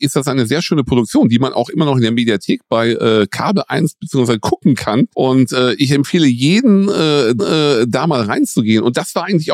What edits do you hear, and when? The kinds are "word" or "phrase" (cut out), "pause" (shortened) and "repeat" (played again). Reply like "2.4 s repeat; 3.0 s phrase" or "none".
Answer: 5.1 s pause; 7.4 s repeat